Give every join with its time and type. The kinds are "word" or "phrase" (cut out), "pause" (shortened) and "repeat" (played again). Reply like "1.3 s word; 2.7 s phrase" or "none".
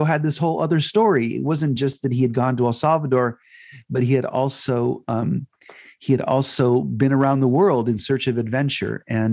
none